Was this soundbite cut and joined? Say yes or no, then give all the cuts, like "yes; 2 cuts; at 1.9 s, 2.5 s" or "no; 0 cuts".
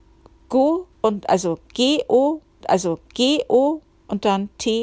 yes; 2 cuts; at 0.9 s, 2.6 s